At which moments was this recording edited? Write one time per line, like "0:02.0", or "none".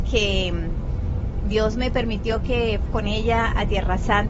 0:02.9